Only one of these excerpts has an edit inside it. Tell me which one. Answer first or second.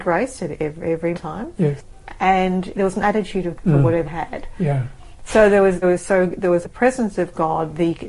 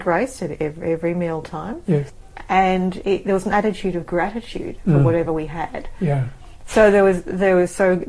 first